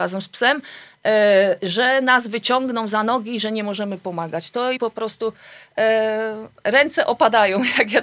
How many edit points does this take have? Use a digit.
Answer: 1